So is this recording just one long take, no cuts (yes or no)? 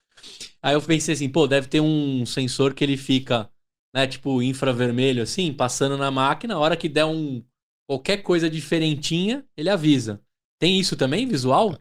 yes